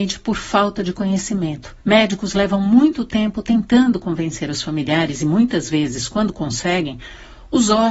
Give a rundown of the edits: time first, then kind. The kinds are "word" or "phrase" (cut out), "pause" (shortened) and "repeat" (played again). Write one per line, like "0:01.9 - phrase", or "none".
0:01.8 - pause